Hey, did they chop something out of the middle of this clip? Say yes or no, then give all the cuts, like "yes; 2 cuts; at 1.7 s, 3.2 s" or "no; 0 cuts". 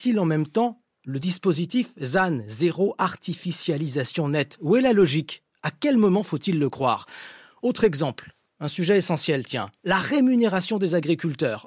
no; 0 cuts